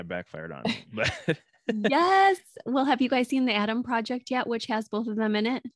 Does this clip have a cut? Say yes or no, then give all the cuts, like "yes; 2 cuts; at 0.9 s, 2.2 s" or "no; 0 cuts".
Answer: no; 0 cuts